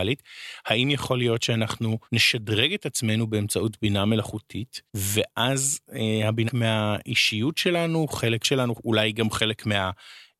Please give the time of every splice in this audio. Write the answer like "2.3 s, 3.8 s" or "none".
2.0 s, 4.9 s, 6.5 s, 8.4 s